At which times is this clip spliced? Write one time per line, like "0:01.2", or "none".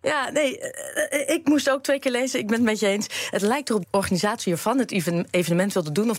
0:03.8